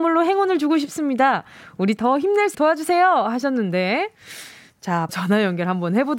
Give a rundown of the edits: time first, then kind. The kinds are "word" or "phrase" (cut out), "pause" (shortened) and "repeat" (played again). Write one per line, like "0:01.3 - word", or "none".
0:02.0 - word
0:02.5 - word
0:05.1 - word